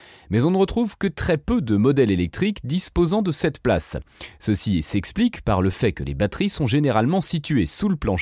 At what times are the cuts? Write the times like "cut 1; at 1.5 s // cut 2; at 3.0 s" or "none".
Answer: none